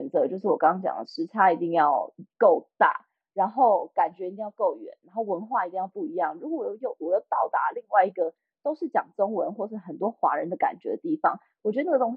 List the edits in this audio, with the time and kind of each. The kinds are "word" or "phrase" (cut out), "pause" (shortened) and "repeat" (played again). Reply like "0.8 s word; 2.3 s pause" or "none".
none